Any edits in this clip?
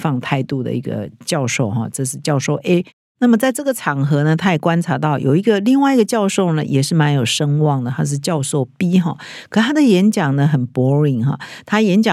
no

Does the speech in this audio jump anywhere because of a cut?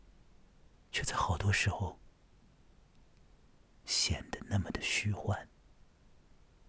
no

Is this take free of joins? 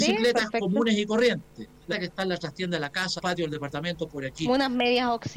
no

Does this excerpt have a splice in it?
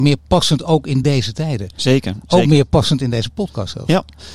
no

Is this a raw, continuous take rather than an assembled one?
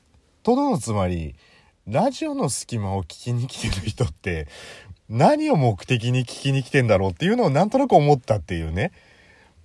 yes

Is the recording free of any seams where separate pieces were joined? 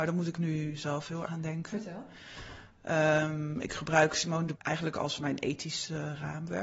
no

